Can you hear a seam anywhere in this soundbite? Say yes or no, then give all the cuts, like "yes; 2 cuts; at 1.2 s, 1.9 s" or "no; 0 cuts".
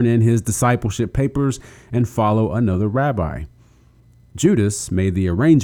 no; 0 cuts